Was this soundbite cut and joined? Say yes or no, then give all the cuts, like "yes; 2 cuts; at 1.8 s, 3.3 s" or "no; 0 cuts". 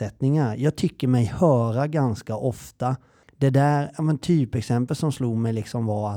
no; 0 cuts